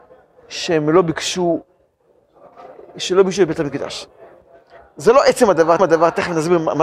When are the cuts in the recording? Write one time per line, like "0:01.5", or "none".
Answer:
0:05.8